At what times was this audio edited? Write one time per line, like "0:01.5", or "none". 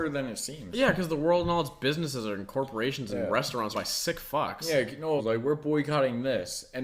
0:03.7
0:05.2